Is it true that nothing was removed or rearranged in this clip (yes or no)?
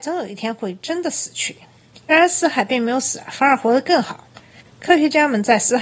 no